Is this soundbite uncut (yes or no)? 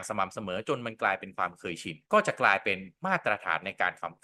no